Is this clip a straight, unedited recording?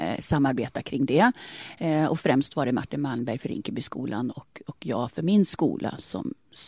yes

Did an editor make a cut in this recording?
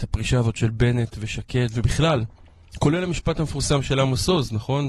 no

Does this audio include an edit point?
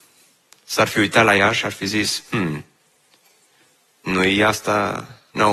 no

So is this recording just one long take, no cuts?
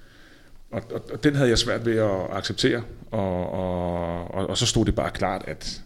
yes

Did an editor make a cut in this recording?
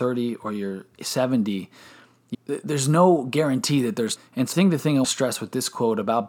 yes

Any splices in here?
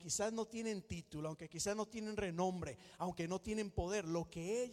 no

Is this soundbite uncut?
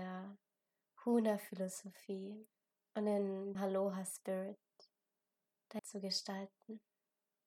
no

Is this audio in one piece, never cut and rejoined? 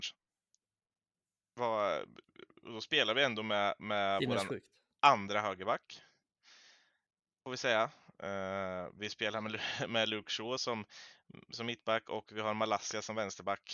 yes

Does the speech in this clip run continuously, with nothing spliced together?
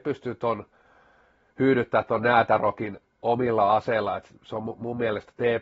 no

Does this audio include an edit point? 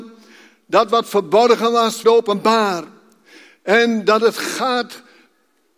yes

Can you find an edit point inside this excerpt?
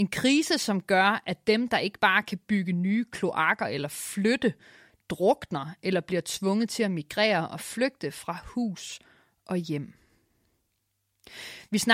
no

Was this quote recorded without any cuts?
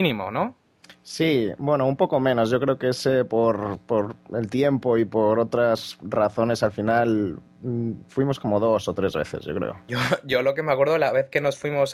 yes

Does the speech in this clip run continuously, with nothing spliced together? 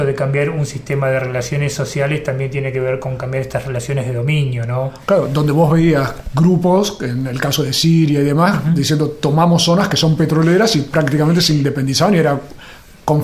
yes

